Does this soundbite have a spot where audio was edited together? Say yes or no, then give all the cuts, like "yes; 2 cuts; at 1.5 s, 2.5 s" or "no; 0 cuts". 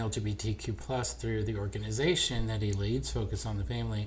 no; 0 cuts